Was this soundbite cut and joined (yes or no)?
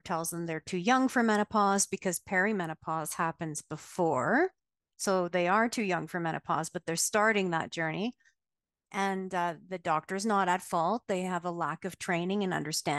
no